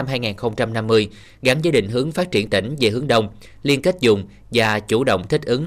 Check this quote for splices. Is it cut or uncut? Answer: uncut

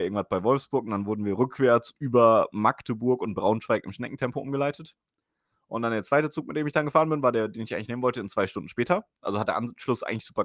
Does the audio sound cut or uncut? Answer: uncut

